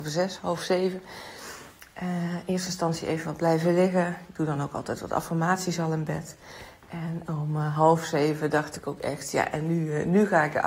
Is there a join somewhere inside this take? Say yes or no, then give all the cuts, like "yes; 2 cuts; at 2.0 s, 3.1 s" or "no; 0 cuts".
no; 0 cuts